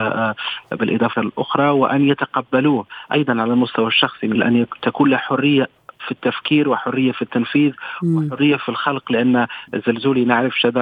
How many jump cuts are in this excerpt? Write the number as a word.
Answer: two